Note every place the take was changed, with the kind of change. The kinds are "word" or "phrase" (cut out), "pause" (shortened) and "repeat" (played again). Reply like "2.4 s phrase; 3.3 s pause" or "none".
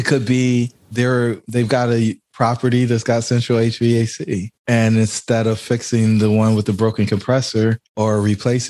none